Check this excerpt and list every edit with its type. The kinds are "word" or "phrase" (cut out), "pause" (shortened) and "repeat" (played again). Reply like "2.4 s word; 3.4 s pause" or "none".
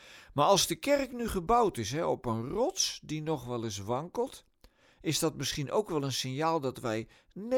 none